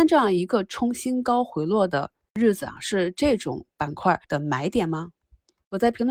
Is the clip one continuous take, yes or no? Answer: no